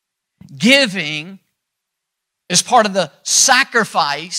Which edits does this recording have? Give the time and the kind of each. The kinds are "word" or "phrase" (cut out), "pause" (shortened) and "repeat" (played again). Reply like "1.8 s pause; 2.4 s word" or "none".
none